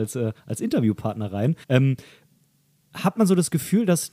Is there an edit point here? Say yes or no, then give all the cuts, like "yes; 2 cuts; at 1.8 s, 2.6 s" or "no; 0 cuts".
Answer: yes; 2 cuts; at 1.6 s, 3.2 s